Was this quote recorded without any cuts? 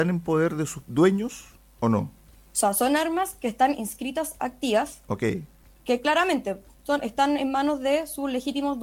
yes; 0 cuts

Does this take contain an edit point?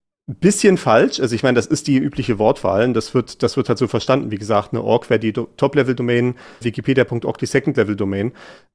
yes; 1 cut; at 6.6 s

